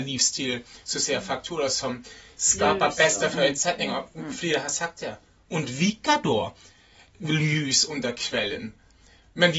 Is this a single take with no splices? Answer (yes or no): yes